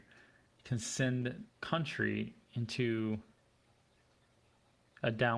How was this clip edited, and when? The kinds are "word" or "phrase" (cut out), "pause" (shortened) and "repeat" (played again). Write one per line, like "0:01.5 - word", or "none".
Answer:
0:01.5 - word